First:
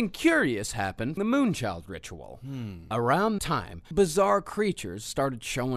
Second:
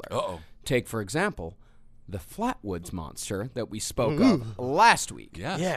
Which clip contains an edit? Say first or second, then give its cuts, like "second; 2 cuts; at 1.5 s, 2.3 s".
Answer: first; 3 cuts; at 1.2 s, 3.4 s, 3.9 s